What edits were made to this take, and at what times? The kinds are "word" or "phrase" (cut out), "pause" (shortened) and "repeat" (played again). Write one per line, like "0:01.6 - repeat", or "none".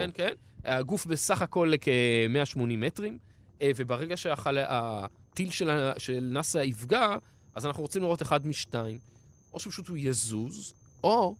none